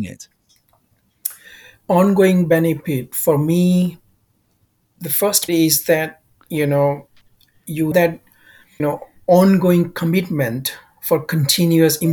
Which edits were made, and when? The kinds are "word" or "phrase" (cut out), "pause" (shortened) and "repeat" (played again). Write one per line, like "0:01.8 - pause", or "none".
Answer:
0:05.5 - word
0:07.9 - word
0:08.8 - word